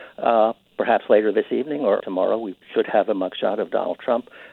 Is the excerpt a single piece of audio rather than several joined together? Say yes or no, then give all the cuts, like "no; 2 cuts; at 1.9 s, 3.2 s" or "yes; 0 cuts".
no; 2 cuts; at 2.0 s, 2.6 s